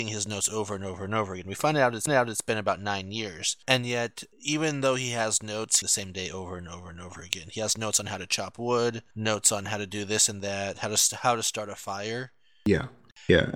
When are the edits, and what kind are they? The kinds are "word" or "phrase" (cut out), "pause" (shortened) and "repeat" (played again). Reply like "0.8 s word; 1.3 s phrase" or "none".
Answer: 2.1 s repeat; 4.3 s pause; 5.8 s phrase; 9.1 s pause